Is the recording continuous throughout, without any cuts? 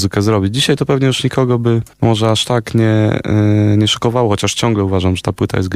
no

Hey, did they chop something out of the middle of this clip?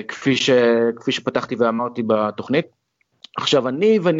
no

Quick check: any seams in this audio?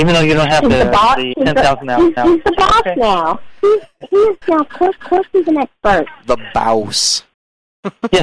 yes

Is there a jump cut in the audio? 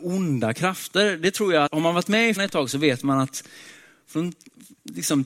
yes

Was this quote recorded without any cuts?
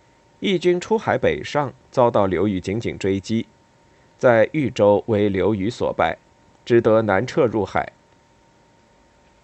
yes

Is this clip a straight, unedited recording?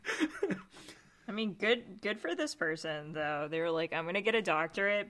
yes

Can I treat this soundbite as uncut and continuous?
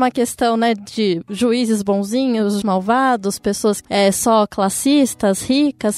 no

